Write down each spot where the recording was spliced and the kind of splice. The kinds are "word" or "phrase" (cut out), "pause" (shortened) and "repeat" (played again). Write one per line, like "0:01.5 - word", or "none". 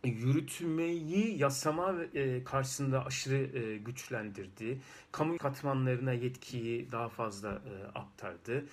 0:05.4 - phrase